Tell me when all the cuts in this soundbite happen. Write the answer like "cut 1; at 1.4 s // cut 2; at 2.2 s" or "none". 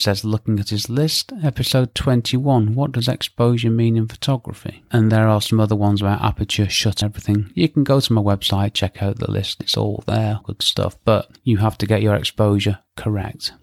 cut 1; at 5.1 s // cut 2; at 7.0 s // cut 3; at 10.4 s

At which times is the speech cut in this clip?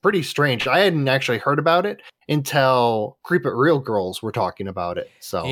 none

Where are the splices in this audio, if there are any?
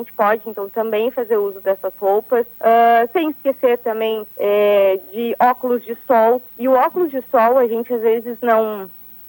cut 1; at 2.5 s // cut 2; at 4.3 s // cut 3; at 6.5 s

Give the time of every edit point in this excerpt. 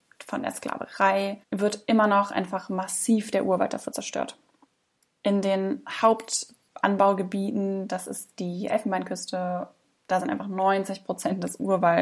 cut 1; at 1.4 s

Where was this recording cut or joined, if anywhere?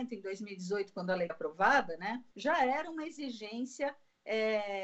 cut 1; at 1.3 s // cut 2; at 2.3 s

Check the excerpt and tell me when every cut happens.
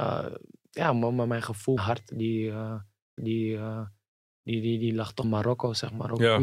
cut 1; at 1.8 s // cut 2; at 3.2 s // cut 3; at 5.2 s

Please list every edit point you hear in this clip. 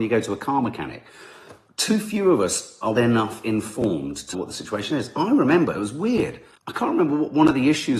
cut 1; at 3.0 s // cut 2; at 4.3 s // cut 3; at 6.6 s

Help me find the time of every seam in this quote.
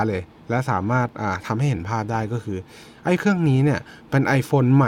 cut 1; at 3.2 s

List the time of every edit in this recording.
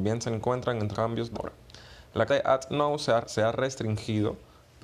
cut 1; at 0.9 s // cut 2; at 1.3 s // cut 3; at 2.3 s // cut 4; at 3.2 s

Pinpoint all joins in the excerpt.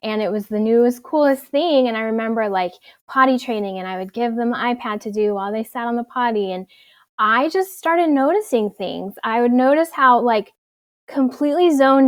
none

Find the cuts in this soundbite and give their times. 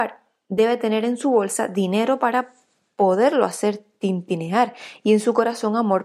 none

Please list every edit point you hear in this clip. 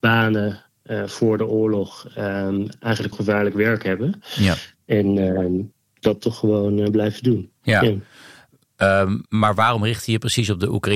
cut 1; at 3.1 s // cut 2; at 9.3 s

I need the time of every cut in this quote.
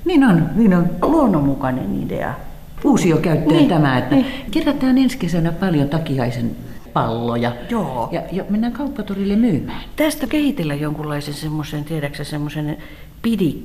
cut 1; at 10.3 s

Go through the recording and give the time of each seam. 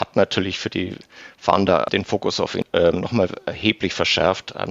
none

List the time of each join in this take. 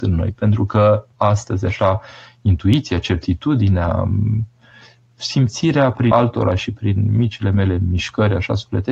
cut 1; at 1.1 s // cut 2; at 6.1 s

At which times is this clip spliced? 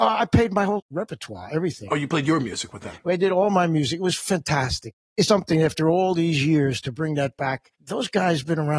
cut 1; at 5.3 s

